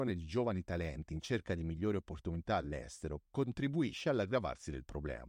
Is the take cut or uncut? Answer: cut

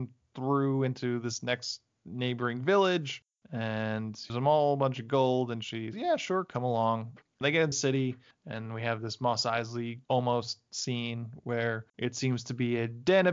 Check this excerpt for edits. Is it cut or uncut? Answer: cut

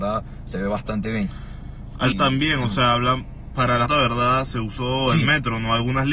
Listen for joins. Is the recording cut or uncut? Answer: cut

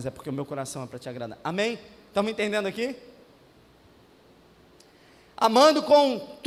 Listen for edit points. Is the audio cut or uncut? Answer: uncut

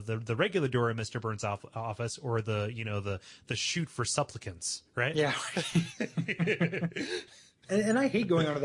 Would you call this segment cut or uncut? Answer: uncut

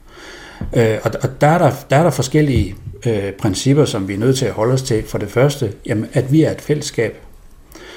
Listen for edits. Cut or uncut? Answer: uncut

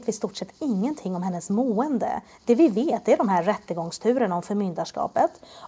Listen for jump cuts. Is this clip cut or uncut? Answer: uncut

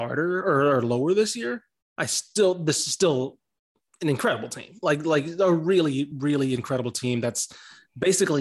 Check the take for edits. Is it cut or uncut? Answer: uncut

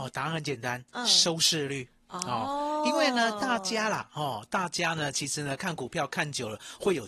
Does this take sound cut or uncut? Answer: uncut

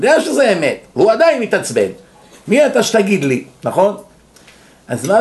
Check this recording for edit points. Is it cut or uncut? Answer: uncut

